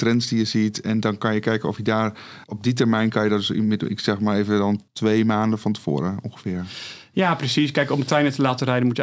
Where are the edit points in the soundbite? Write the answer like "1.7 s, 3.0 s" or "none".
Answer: 2.4 s, 4.9 s